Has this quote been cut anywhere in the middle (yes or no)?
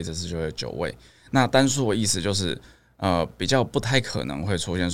no